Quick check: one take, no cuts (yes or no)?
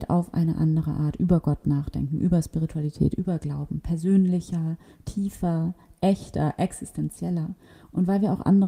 yes